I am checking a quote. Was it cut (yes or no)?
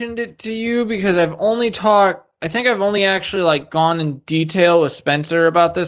no